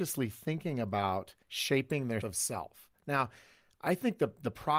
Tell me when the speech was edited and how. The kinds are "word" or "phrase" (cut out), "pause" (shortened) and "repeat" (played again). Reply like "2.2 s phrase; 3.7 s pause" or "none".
1.4 s pause; 2.2 s word